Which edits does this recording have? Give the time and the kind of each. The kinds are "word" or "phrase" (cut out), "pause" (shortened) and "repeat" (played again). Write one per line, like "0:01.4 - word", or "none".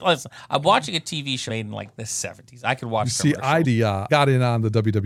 0:01.5 - phrase
0:03.6 - word
0:04.1 - word